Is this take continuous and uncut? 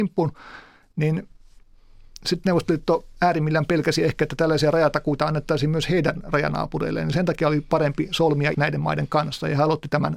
no; 1 cut; at 8.5 s

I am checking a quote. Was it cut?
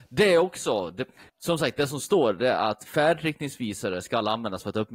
yes; 1 cut; at 1.3 s

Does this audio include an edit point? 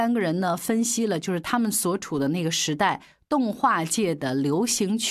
no; 0 cuts

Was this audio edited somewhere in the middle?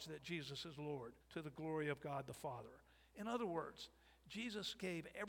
yes; 1 cut; at 1.2 s

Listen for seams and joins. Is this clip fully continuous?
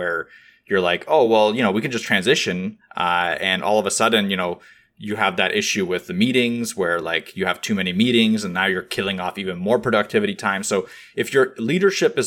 yes; 0 cuts

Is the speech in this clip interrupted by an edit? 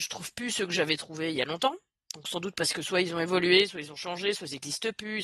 no; 0 cuts

